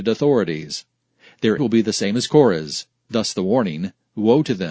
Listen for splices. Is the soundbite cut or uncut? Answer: cut